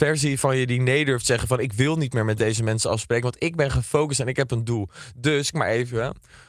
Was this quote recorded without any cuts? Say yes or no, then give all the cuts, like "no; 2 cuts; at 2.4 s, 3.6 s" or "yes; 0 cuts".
no; 1 cut; at 5.5 s